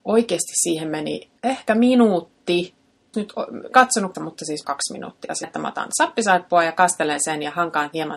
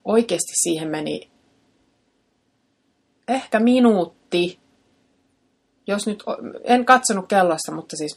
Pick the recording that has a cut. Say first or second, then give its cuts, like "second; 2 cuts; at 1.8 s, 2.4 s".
first; 6 cuts; at 1.4 s, 3.1 s, 3.7 s, 4.1 s, 4.6 s, 5.4 s